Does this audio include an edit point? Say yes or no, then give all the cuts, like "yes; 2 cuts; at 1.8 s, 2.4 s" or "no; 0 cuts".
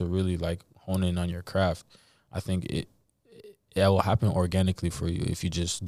no; 0 cuts